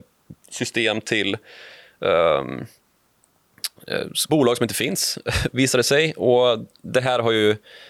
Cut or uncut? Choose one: cut